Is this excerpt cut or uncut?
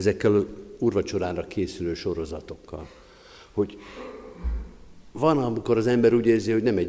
uncut